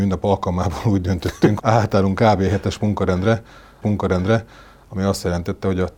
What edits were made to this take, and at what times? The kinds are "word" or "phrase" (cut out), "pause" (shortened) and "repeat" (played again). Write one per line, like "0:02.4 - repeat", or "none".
0:01.6 - word
0:03.8 - repeat